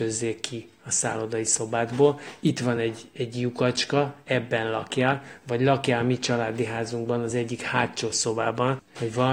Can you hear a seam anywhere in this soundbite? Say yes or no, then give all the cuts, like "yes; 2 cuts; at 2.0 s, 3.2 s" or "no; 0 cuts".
no; 0 cuts